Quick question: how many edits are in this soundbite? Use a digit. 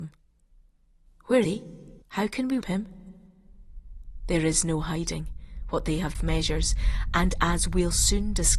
4